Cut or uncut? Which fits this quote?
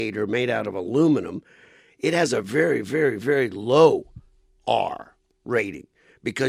uncut